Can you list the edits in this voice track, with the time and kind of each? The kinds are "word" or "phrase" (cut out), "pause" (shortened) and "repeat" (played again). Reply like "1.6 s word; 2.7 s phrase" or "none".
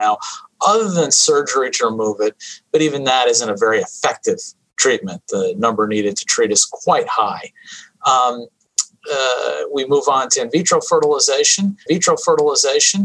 11.9 s repeat